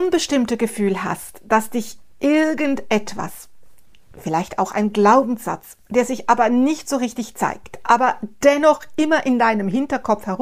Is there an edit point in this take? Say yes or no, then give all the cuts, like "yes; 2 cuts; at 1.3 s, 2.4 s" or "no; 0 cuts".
no; 0 cuts